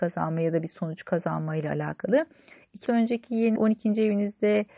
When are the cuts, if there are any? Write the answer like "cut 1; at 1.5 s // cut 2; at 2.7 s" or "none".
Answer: cut 1; at 2.9 s // cut 2; at 3.6 s